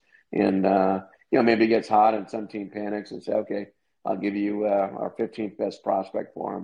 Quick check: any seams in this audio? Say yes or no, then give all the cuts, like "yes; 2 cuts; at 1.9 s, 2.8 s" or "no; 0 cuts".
no; 0 cuts